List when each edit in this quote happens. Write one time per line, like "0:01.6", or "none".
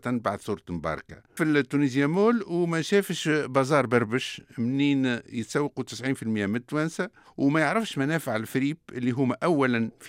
0:01.4